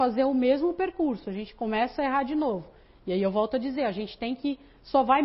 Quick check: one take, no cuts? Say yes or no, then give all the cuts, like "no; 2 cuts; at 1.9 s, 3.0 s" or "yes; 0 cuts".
yes; 0 cuts